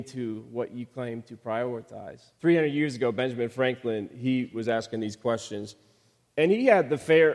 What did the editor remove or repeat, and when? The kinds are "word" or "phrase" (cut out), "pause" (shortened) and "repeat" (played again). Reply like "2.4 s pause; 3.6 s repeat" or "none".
2.3 s pause